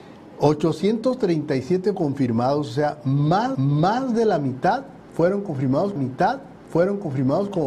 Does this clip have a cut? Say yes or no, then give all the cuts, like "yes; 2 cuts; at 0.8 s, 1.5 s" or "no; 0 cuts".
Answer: yes; 3 cuts; at 1.9 s, 3.5 s, 6.0 s